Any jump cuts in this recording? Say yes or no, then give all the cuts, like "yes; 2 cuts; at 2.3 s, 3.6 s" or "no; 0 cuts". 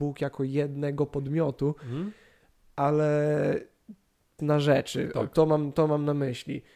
yes; 1 cut; at 4.4 s